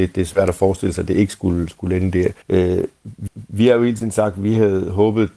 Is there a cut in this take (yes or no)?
yes